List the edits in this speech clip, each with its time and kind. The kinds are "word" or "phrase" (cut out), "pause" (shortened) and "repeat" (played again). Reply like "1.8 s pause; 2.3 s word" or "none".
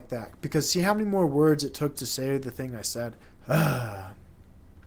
2.0 s word; 3.2 s pause